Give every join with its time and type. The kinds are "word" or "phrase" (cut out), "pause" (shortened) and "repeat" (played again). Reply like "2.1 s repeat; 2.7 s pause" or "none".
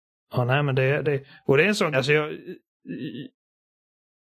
1.0 s word; 1.9 s word